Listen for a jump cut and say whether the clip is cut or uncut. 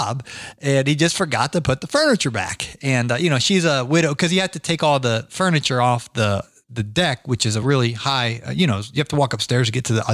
uncut